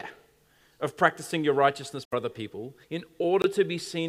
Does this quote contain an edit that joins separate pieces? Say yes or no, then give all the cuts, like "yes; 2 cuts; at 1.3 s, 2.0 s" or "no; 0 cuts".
yes; 2 cuts; at 2.0 s, 2.8 s